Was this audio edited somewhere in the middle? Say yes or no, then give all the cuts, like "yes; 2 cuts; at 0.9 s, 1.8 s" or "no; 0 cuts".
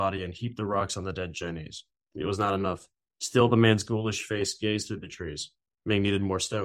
no; 0 cuts